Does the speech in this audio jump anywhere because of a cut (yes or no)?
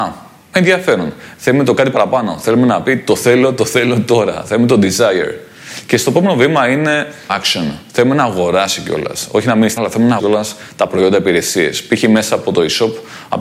yes